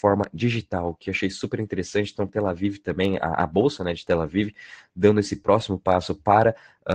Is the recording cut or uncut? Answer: uncut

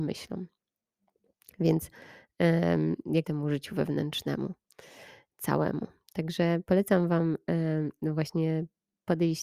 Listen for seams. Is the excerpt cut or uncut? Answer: cut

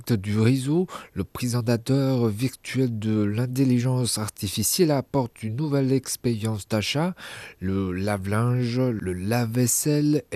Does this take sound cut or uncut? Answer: uncut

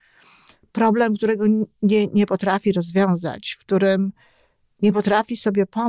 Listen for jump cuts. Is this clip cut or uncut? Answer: uncut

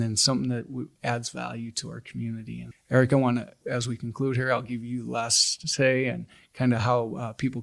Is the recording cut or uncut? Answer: cut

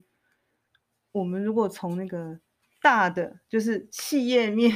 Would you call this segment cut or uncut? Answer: uncut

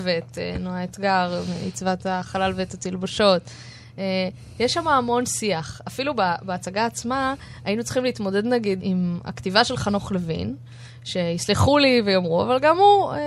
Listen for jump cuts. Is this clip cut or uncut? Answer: cut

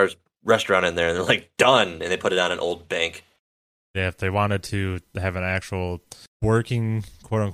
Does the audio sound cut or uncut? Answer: uncut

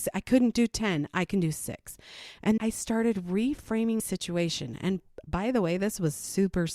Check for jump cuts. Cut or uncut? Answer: cut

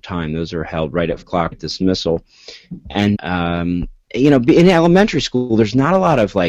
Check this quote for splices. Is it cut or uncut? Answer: cut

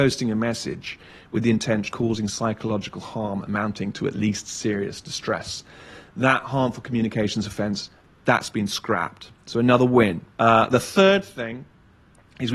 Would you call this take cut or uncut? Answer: cut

